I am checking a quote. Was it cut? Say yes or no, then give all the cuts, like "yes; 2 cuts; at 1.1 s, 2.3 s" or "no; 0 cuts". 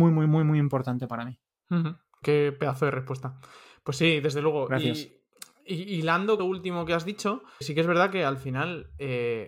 yes; 3 cuts; at 2.2 s, 6.4 s, 7.6 s